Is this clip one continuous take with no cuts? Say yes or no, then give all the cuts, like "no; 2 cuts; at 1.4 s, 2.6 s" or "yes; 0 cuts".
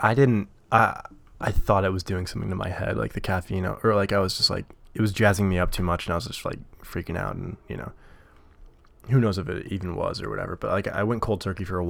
yes; 0 cuts